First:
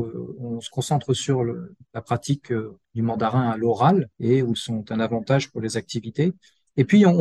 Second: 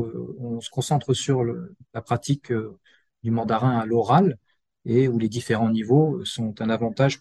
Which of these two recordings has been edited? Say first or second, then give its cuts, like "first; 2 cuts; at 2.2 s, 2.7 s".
first; 3 cuts; at 2.8 s, 4.1 s, 4.5 s